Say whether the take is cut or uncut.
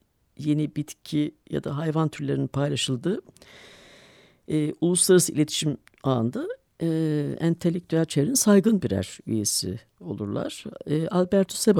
uncut